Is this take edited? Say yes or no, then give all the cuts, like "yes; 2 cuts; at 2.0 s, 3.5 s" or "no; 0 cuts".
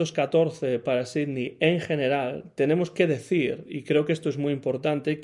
no; 0 cuts